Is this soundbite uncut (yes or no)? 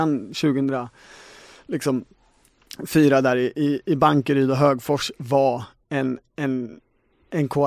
yes